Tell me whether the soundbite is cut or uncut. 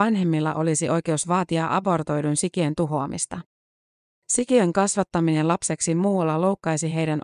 uncut